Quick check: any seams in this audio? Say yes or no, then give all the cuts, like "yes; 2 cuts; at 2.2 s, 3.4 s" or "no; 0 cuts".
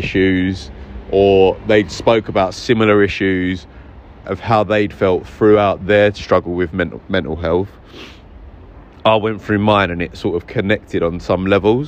no; 0 cuts